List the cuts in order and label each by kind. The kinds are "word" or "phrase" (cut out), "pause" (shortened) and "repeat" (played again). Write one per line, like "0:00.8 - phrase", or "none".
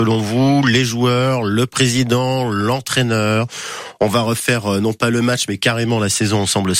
none